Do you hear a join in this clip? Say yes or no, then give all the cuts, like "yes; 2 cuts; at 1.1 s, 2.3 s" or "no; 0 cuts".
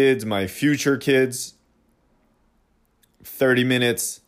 no; 0 cuts